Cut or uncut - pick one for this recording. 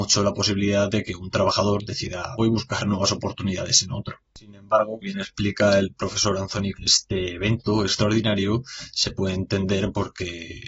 cut